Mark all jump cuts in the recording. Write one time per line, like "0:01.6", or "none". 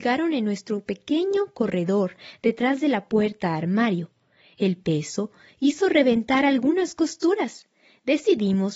none